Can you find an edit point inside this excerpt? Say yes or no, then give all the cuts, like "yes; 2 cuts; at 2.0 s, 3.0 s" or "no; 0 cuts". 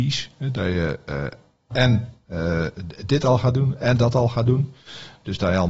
no; 0 cuts